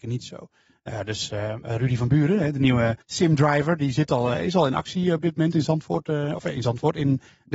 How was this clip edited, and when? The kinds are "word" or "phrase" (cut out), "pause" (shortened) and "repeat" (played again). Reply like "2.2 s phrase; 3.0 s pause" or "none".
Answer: 3.0 s pause